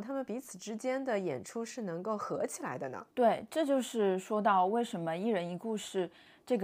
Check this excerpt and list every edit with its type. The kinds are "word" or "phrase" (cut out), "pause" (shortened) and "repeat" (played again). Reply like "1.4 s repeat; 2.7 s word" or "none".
3.1 s pause

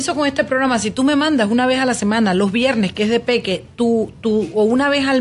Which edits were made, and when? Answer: none

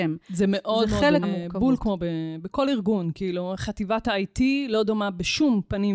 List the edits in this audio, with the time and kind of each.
1.2 s word

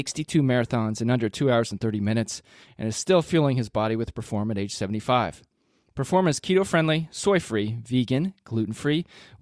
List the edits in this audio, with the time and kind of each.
none

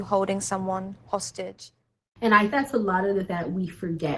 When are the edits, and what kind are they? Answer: 2.5 s word; 3.2 s word

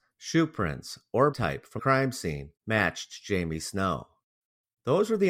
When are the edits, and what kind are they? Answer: 1.3 s word; 1.8 s word; 2.6 s pause

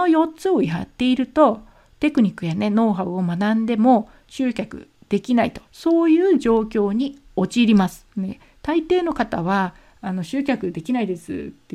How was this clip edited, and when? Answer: 5.6 s pause; 8.1 s pause

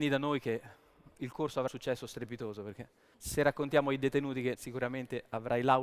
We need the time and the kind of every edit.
1.1 s word; 1.7 s word; 3.1 s pause; 4.5 s phrase

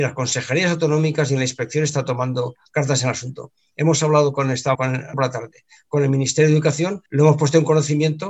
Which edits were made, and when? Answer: 4.7 s word; 5.1 s phrase; 7.1 s pause

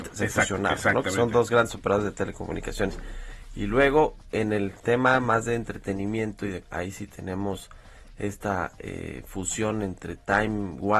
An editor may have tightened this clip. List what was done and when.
6.6 s word

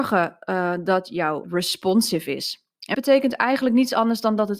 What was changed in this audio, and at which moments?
1.4 s word; 2.9 s word

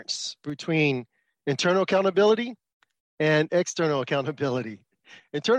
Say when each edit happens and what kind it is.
none

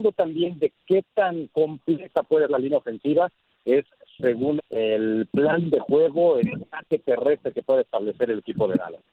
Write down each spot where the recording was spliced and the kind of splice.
2.5 s word; 4.6 s word; 6.4 s word

